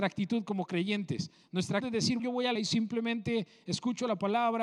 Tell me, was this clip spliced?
yes; 3 cuts; at 1.8 s, 2.2 s, 2.6 s

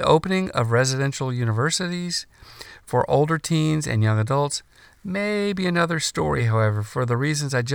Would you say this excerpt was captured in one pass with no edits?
yes; 0 cuts

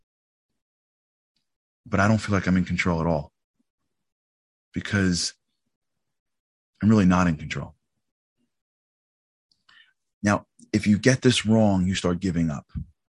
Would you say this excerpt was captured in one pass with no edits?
yes; 0 cuts

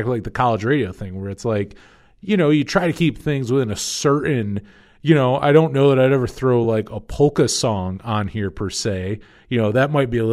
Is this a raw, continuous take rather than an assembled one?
yes; 0 cuts

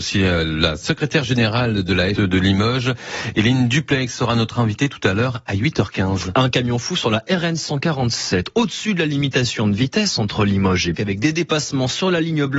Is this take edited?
yes; 2 cuts; at 2.2 s, 10.9 s

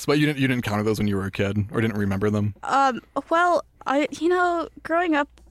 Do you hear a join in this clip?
no; 0 cuts

